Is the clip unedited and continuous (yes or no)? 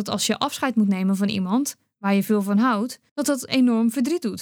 no